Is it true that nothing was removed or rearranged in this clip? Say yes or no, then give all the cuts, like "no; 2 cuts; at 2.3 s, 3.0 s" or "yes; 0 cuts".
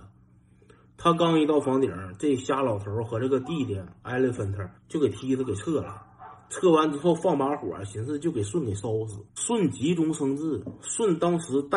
no; 2 cuts; at 4.8 s, 9.3 s